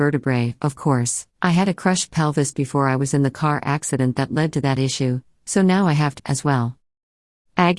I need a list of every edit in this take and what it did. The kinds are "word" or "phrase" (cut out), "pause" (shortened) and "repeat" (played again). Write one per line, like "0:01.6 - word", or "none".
0:01.3 - pause
0:06.2 - phrase